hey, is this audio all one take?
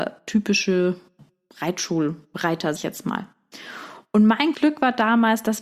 no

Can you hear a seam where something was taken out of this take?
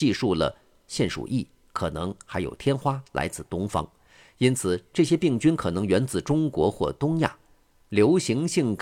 no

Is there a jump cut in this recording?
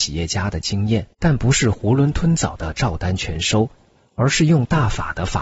yes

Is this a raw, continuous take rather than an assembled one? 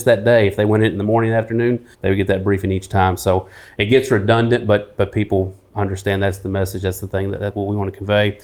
no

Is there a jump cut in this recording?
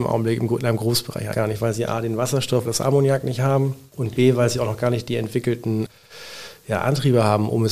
yes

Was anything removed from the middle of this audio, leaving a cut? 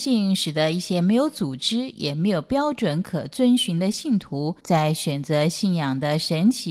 yes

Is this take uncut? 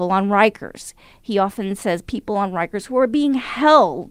yes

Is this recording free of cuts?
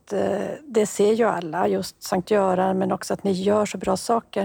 yes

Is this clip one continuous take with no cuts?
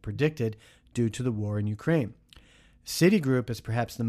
yes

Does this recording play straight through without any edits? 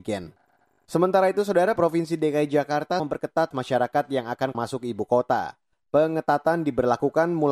no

